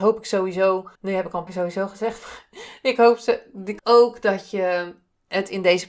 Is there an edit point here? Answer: yes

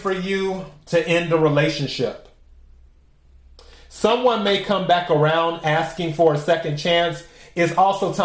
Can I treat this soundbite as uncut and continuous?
yes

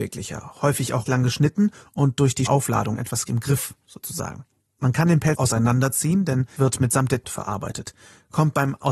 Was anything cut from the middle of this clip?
yes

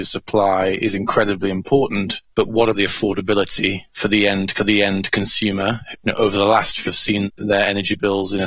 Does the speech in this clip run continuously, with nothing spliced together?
no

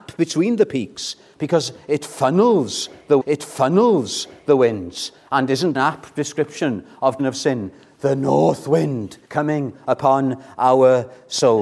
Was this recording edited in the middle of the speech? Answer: yes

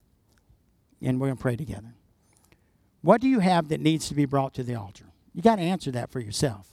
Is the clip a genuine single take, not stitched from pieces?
yes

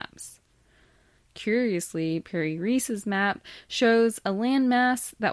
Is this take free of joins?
yes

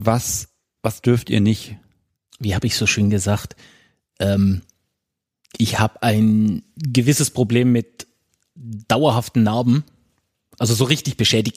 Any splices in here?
no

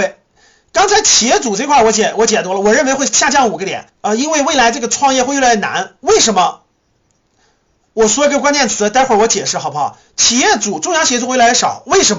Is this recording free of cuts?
no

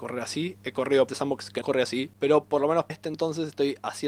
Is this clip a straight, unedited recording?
no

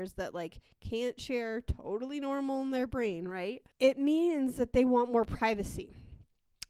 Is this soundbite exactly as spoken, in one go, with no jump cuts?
no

